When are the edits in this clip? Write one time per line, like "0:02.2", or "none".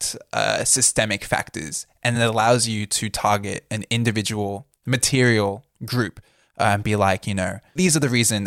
none

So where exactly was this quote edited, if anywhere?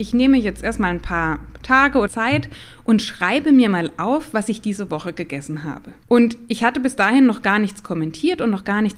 0:02.1
0:06.0

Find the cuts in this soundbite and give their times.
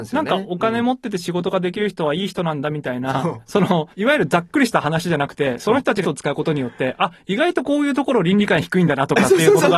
0:03.9
0:06.0

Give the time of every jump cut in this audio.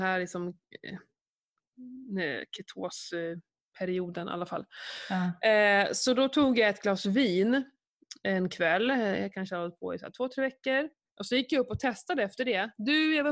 0:11.0

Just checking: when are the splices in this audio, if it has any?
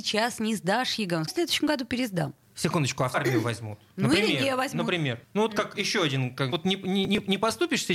0:01.3
0:02.4
0:03.1
0:05.2
0:05.8
0:06.5
0:07.1

